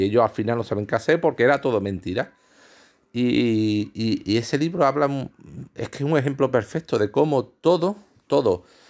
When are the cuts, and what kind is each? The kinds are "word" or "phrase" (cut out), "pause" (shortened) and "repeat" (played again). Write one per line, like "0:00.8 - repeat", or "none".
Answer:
none